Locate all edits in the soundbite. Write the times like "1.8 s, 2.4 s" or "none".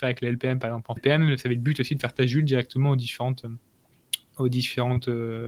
1.0 s